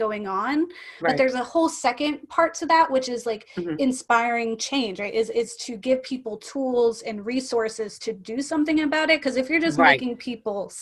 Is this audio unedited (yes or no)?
no